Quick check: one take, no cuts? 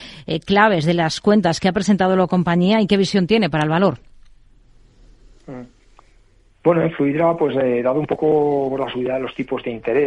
yes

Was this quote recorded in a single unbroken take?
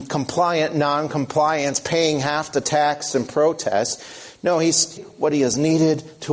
no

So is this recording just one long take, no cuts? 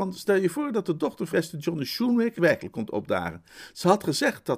no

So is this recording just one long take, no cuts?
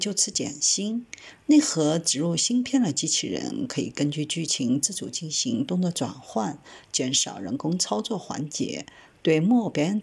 yes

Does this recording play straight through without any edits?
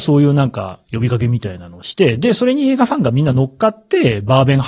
yes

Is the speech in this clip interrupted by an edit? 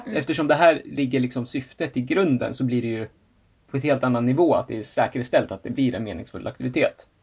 no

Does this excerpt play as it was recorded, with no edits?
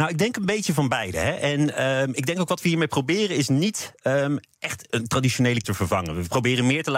no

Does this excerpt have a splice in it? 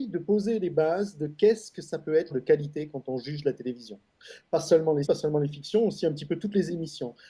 yes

